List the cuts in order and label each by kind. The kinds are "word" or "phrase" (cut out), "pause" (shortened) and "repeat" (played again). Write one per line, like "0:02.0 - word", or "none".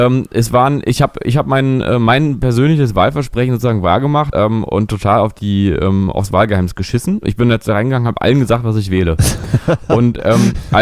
0:04.3 - word